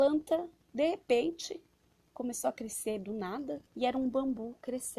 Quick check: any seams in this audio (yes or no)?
yes